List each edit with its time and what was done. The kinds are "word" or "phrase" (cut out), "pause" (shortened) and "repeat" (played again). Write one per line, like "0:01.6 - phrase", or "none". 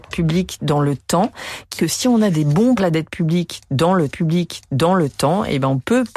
0:01.8 - word
0:02.8 - phrase
0:04.1 - repeat